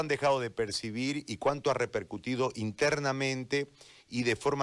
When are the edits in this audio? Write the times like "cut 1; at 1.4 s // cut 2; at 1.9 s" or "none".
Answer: none